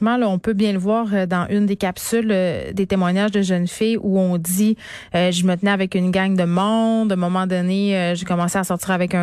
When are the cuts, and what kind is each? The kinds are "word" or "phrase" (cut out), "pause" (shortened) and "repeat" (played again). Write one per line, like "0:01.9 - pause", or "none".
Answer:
none